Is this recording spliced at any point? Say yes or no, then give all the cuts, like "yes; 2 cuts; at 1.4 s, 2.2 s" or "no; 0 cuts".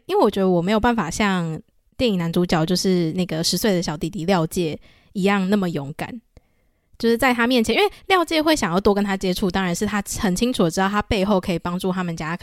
no; 0 cuts